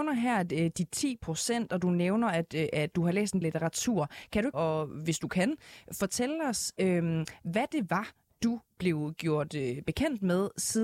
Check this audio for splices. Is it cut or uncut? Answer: cut